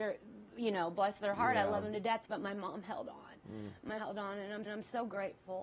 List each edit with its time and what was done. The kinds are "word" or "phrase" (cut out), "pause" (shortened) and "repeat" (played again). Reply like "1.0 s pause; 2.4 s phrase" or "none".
2.2 s pause; 4.0 s word; 4.7 s repeat